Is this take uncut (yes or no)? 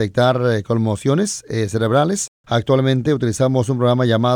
yes